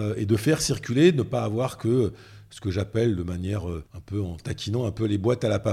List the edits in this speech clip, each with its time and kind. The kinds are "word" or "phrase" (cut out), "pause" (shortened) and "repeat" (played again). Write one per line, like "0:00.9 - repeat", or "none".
0:03.9 - pause